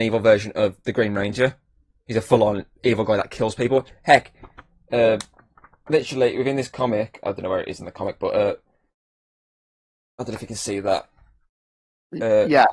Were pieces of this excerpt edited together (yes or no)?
no